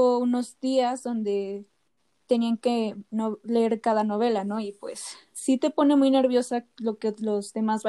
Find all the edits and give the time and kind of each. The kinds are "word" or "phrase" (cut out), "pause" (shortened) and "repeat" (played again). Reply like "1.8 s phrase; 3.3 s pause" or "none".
none